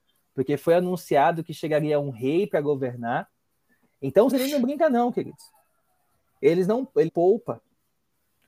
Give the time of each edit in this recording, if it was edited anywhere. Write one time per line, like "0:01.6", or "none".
0:04.3
0:07.1